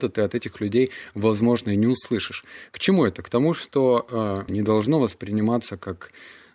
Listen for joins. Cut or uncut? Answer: cut